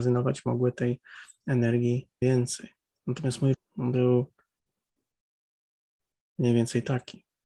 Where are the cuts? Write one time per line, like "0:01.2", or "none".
0:02.2
0:03.5